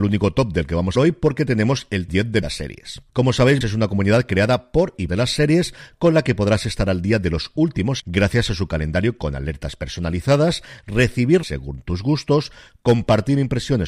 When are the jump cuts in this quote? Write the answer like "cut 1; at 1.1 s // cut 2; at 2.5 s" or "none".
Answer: cut 1; at 1.0 s // cut 2; at 2.1 s // cut 3; at 2.4 s // cut 4; at 3.1 s // cut 5; at 3.6 s // cut 6; at 5.1 s // cut 7; at 8.0 s // cut 8; at 11.4 s